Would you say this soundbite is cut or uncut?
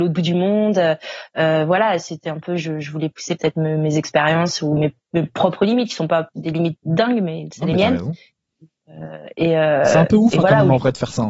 uncut